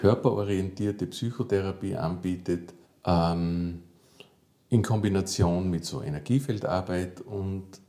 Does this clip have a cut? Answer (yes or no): yes